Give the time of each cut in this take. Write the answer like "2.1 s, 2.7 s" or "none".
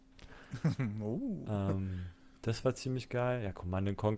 none